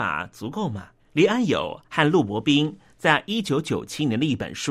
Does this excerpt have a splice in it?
yes; 1 cut; at 1.0 s

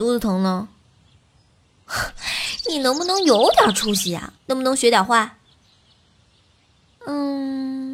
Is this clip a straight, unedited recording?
no; 1 cut; at 4.4 s

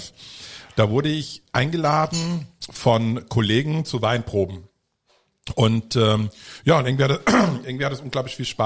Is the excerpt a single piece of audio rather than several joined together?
no; 1 cut; at 1.5 s

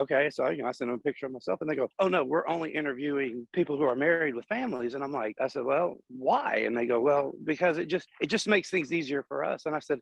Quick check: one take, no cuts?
no; 1 cut; at 5.4 s

